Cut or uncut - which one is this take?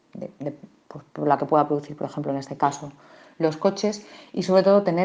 uncut